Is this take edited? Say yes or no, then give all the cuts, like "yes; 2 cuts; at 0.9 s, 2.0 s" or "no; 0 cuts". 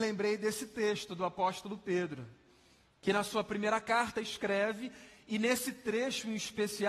no; 0 cuts